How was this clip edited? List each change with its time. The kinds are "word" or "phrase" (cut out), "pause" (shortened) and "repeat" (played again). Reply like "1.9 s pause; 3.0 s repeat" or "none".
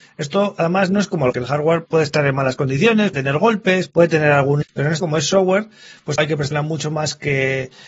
1.3 s word; 1.9 s word; 3.1 s word; 4.6 s word; 5.0 s word; 6.2 s word; 6.5 s word